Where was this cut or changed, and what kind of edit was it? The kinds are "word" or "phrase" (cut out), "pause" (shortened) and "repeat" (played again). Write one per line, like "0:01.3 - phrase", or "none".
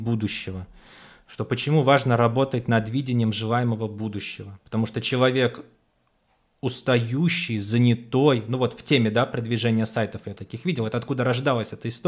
none

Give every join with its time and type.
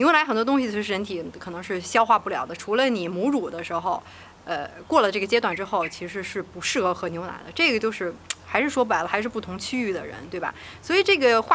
none

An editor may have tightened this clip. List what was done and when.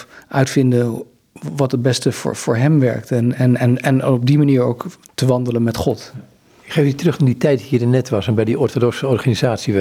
none

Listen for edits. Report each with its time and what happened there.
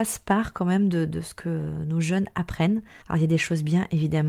0:03.0 - pause

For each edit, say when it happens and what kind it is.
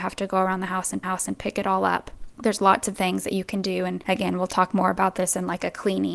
0:01.0 - repeat
0:02.3 - pause
0:02.9 - word

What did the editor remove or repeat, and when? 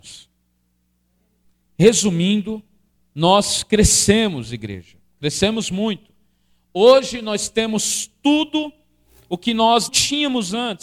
0:09.9 - word

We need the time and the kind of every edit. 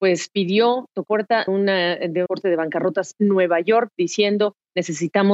0:01.1 - word
0:01.5 - word
0:02.3 - word
0:03.1 - word

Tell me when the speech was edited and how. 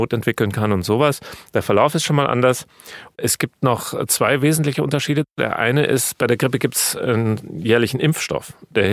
none

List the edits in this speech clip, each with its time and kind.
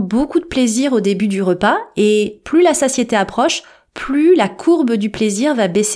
none

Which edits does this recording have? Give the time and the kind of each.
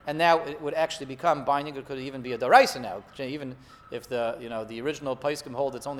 none

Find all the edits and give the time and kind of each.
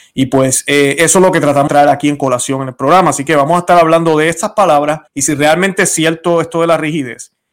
0:01.7 - word
0:05.1 - pause

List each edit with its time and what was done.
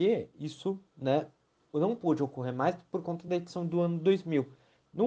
none

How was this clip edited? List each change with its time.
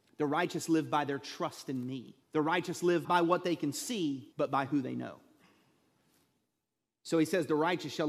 0:02.2 - pause
0:03.0 - word
0:04.3 - pause

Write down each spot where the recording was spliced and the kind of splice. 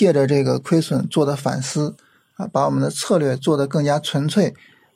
none

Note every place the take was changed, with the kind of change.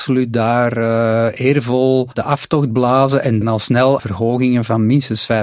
0:02.1 - word
0:03.4 - word
0:04.0 - word

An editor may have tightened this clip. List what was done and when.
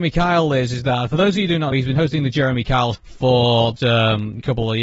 0:01.7 - word
0:02.9 - word
0:03.8 - word

